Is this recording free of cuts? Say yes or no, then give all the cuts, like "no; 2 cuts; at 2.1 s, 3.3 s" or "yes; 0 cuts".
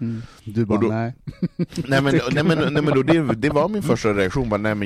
yes; 0 cuts